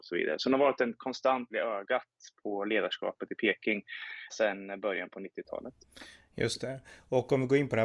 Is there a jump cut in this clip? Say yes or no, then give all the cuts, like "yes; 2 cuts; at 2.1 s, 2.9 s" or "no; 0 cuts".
yes; 3 cuts; at 1.5 s, 2.4 s, 4.3 s